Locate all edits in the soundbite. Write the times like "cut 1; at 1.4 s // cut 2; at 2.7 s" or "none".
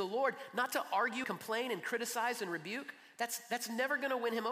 cut 1; at 1.2 s